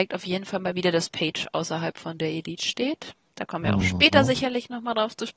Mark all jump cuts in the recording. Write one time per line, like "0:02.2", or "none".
none